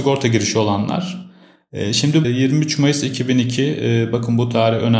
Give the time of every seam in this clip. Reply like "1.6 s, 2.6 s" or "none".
2.2 s